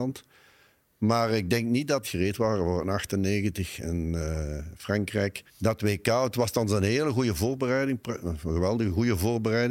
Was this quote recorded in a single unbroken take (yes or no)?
no